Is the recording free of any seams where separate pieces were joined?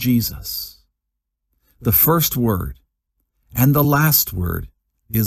yes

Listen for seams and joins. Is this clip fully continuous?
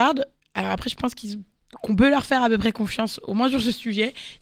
yes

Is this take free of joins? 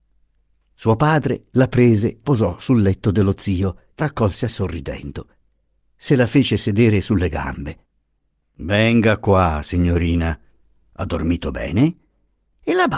no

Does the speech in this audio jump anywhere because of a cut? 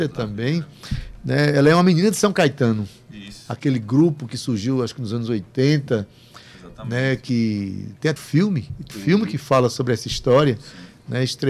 yes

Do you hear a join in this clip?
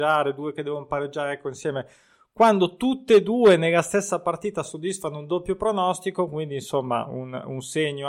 no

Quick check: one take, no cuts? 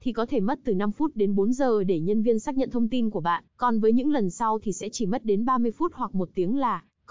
no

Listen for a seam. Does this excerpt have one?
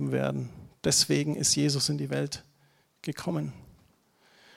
no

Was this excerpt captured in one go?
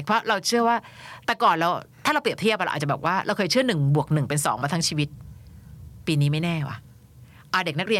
no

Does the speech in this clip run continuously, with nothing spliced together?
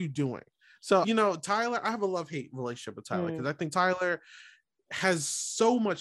no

